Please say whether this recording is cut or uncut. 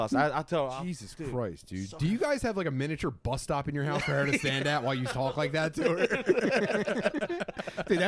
uncut